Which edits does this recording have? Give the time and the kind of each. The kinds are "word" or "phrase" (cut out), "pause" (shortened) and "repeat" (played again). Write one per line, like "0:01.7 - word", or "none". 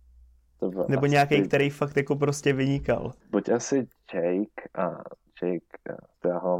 0:03.2 - pause